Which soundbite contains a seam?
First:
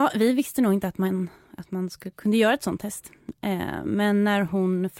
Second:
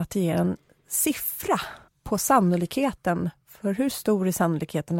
second; 1 cut; at 1.9 s

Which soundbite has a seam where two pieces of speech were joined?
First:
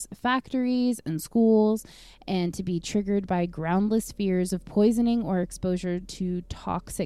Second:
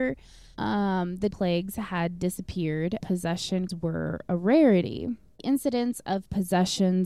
second; 4 cuts; at 1.3 s, 3.0 s, 3.7 s, 5.4 s

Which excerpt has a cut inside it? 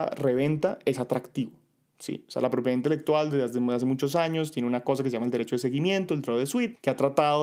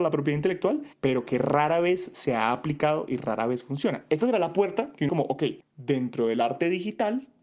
second; 2 cuts; at 0.9 s, 5.1 s

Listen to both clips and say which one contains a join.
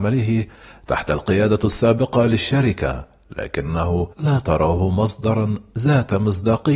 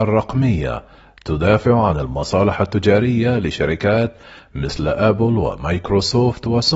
first; 1 cut; at 4.1 s

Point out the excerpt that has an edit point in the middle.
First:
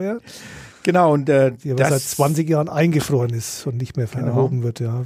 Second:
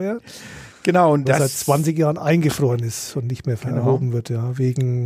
second; 1 cut; at 1.2 s

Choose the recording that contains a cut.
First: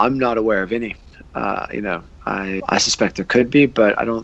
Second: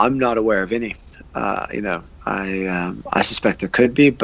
first; 1 cut; at 2.6 s

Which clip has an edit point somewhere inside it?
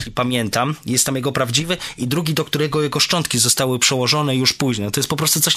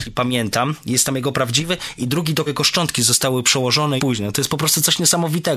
second; 2 cuts; at 2.5 s, 4.0 s

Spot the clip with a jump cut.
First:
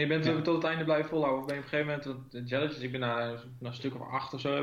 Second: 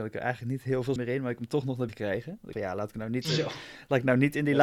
second; 3 cuts; at 1.0 s, 1.9 s, 2.5 s

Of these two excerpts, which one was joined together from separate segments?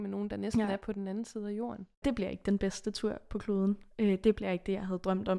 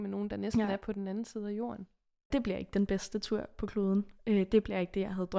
first; 1 cut; at 1.9 s

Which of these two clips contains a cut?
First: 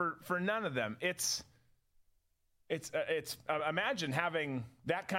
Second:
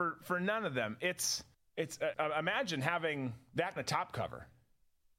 second; 3 cuts; at 1.5 s, 2.1 s, 3.8 s

